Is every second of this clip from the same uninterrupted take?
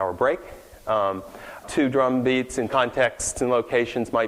no; 2 cuts; at 1.6 s, 2.7 s

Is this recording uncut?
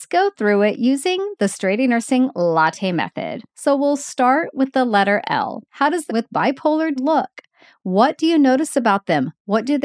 no; 4 cuts; at 3.5 s, 5.7 s, 6.1 s, 7.0 s

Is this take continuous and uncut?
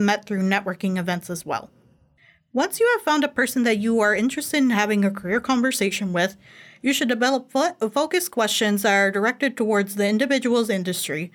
yes; 0 cuts

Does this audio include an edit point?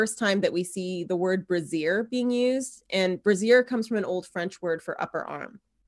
no; 0 cuts

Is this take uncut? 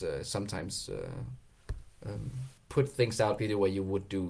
no; 2 cuts; at 2.6 s, 3.4 s

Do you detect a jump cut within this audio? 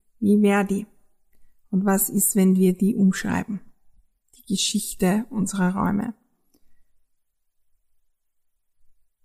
no; 0 cuts

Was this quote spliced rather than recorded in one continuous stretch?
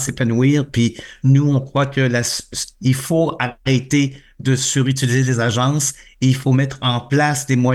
no; 0 cuts

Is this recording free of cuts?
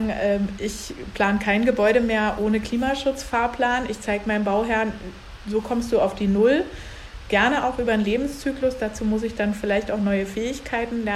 yes; 0 cuts

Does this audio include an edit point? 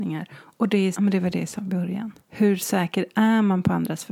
yes; 2 cuts; at 0.9 s, 2.2 s

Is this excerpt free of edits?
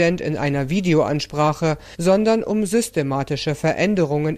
yes; 0 cuts

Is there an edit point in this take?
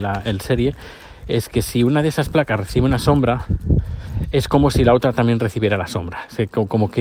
no; 0 cuts

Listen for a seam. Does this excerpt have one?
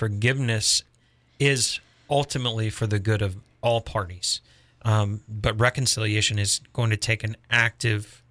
no; 0 cuts

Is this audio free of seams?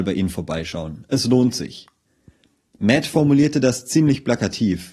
yes; 0 cuts

